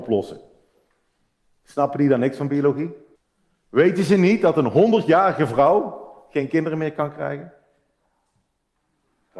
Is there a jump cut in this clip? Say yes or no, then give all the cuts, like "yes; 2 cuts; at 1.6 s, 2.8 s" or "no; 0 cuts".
yes; 1 cut; at 3.2 s